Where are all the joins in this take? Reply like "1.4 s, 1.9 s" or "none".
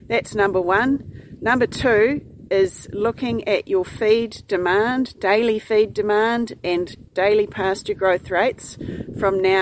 none